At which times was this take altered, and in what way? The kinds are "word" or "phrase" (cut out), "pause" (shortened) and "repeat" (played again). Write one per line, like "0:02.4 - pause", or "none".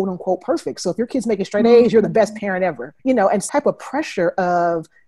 0:03.0 - pause
0:03.5 - word